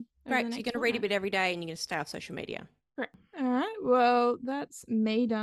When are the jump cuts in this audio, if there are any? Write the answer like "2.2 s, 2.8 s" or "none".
none